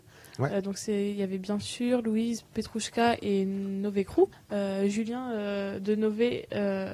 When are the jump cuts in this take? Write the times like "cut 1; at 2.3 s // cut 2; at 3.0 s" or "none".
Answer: cut 1; at 4.3 s